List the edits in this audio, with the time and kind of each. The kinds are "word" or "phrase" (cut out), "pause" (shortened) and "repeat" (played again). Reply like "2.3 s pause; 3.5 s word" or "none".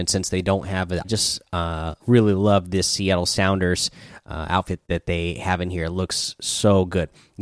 1.0 s phrase; 2.0 s pause; 4.8 s pause